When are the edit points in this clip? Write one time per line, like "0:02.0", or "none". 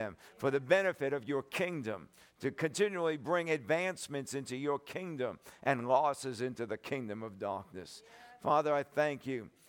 none